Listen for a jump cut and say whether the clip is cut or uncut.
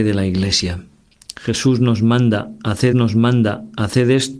cut